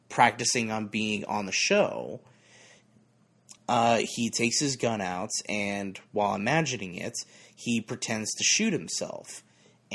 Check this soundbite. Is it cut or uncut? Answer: uncut